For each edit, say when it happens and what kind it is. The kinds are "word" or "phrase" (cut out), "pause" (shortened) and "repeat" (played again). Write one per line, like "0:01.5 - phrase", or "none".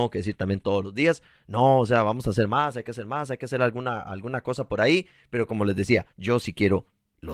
0:06.1 - pause